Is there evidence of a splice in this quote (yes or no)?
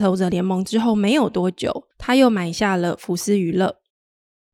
yes